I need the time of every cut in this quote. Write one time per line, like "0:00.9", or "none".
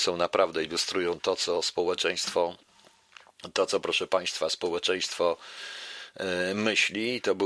none